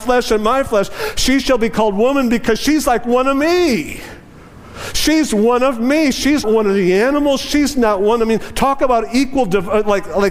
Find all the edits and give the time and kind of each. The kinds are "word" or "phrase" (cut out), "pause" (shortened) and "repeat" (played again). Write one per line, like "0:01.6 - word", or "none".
0:06.4 - word